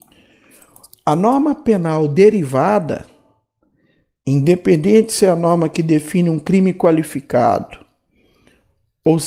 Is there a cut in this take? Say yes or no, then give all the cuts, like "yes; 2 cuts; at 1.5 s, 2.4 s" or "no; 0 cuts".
no; 0 cuts